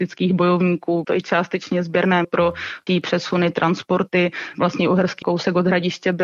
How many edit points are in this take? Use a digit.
4